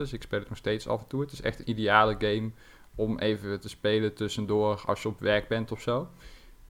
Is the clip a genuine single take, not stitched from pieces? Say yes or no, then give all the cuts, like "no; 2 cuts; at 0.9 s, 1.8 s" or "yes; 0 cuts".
yes; 0 cuts